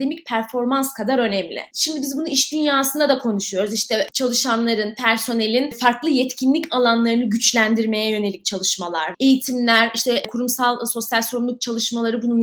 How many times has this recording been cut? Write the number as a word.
one